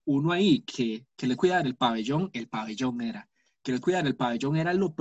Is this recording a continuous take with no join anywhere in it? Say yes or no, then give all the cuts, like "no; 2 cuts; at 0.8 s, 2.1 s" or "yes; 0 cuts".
no; 2 cuts; at 1.4 s, 3.8 s